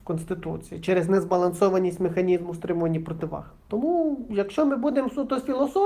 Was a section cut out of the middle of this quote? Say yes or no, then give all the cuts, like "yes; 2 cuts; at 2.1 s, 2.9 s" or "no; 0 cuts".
no; 0 cuts